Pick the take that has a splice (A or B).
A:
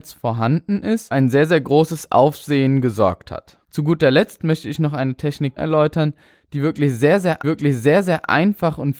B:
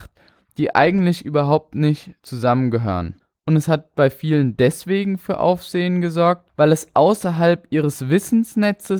A